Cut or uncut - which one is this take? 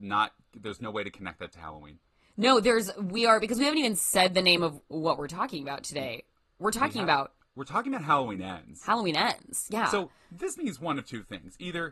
uncut